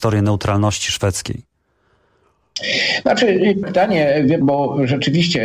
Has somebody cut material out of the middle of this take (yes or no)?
yes